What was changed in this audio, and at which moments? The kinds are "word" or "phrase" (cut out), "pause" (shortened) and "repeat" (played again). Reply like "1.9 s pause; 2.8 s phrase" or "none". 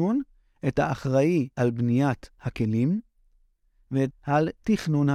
1.5 s pause; 4.1 s word